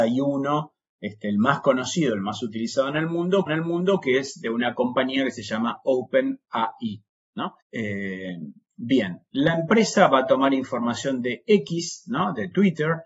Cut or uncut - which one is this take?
cut